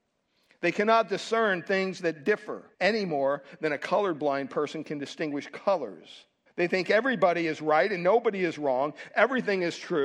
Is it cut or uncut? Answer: cut